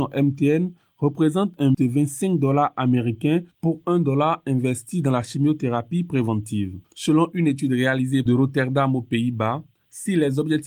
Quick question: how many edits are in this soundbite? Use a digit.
3